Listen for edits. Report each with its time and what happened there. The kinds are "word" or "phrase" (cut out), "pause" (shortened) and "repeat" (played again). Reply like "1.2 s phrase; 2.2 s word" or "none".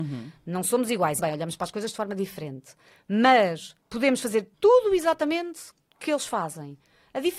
1.2 s word; 3.8 s pause; 4.5 s pause